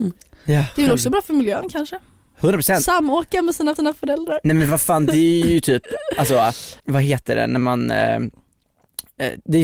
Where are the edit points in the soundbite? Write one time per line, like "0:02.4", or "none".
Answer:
0:03.8
0:06.8